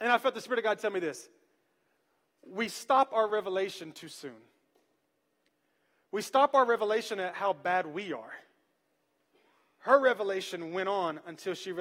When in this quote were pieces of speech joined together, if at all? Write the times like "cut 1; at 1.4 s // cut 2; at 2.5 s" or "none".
none